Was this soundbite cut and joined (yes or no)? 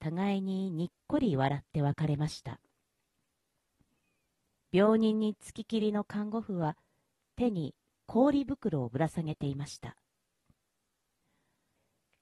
no